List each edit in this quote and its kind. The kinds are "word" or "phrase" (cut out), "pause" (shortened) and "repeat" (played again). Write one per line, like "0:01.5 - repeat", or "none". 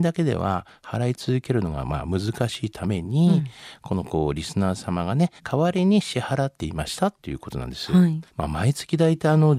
0:05.4 - pause
0:08.3 - pause